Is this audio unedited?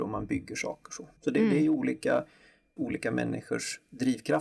no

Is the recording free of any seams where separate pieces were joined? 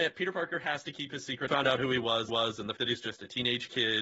no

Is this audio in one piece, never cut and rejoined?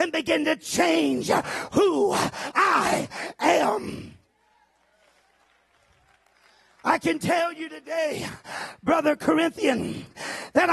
yes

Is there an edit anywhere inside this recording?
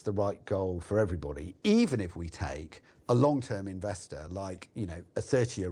no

